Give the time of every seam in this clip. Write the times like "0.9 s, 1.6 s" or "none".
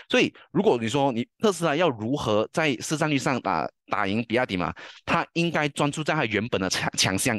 1.3 s